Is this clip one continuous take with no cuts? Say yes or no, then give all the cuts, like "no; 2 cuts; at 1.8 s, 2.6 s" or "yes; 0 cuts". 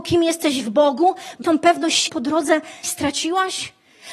no; 3 cuts; at 1.4 s, 2.1 s, 2.8 s